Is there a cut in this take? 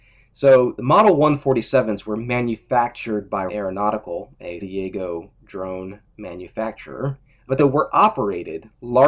yes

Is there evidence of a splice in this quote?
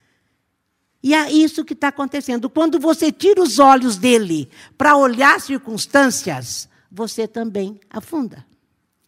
no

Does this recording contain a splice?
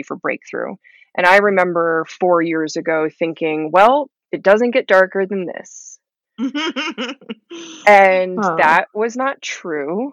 yes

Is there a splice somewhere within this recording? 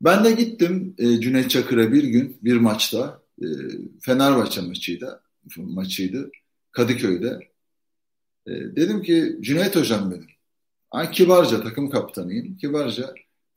no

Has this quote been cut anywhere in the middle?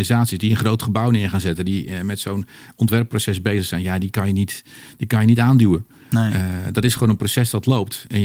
no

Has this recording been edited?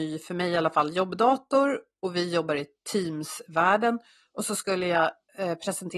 no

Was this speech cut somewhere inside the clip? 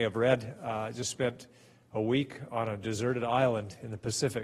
no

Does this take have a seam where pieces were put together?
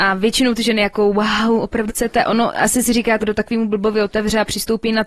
yes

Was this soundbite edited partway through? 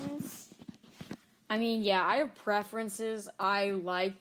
no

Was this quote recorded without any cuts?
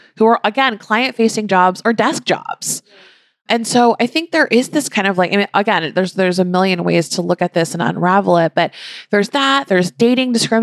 yes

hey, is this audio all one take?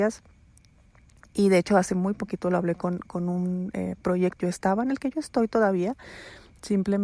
no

